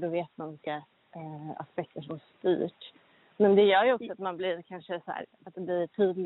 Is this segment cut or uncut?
uncut